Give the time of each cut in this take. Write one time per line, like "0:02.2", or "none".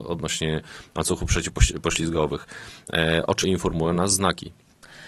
0:03.4